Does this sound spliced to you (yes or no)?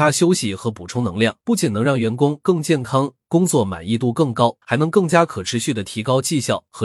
yes